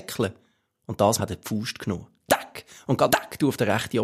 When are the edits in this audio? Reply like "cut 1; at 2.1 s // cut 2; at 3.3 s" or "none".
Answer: cut 1; at 1.2 s // cut 2; at 3.1 s